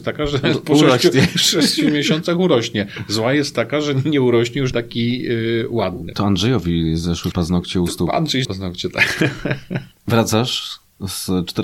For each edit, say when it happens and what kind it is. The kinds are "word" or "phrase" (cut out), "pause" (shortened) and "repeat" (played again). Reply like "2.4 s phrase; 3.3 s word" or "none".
4.7 s word; 7.3 s word; 8.4 s word

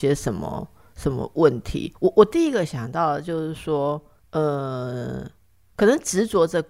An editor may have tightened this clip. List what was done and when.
1.9 s pause

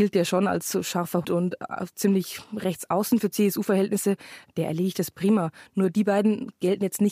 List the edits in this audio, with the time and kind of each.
1.2 s word

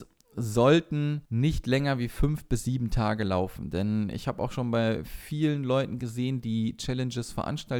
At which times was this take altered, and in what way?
1.3 s pause

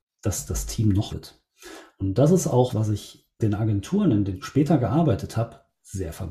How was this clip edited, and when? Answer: 1.1 s word; 2.7 s word; 3.4 s word; 4.3 s word

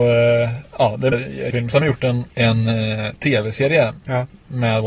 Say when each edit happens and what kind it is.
1.1 s word; 1.5 s word; 1.8 s word; 2.3 s pause

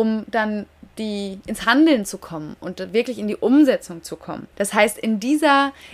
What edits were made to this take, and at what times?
4.5 s pause

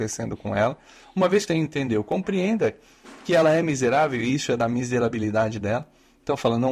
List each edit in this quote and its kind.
1.5 s word

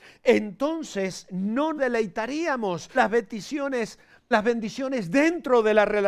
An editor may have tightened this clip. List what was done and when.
1.8 s word; 2.9 s word; 4.3 s word

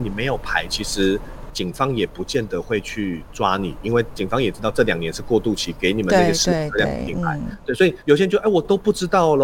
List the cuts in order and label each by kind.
8.0 s pause

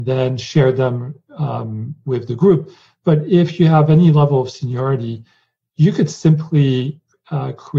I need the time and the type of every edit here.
none

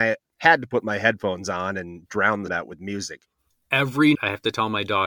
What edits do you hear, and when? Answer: 2.1 s word; 2.5 s word; 4.1 s word

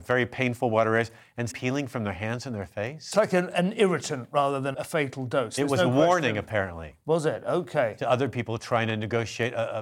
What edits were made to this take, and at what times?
1.5 s word; 3.1 s word; 4.7 s word

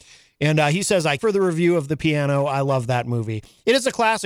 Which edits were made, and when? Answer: 1.2 s phrase

